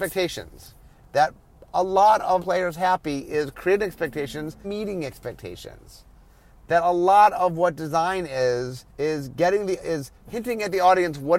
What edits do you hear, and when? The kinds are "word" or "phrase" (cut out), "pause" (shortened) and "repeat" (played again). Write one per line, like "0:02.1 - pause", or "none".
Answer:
0:02.4 - word
0:04.6 - word
0:08.9 - pause